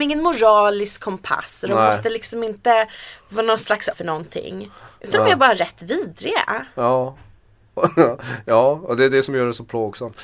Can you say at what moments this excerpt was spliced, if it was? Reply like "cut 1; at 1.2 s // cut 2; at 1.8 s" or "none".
cut 1; at 3.9 s